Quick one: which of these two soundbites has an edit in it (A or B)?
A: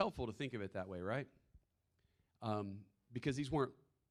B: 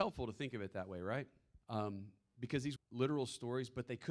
B